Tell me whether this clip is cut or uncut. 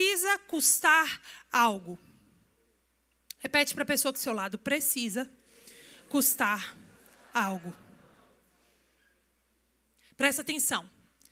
cut